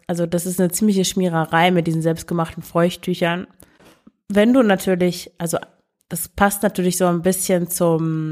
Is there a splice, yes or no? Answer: no